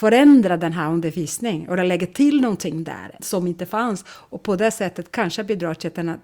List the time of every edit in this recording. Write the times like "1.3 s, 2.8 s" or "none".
3.2 s